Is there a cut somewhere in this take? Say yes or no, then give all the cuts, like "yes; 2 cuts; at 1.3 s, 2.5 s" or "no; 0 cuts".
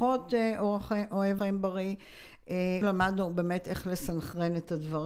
yes; 2 cuts; at 1.4 s, 2.8 s